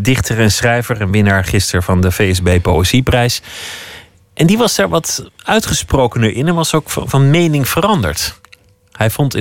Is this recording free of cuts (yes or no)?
yes